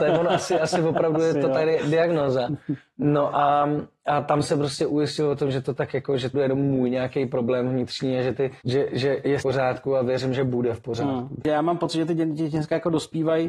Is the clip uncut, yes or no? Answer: no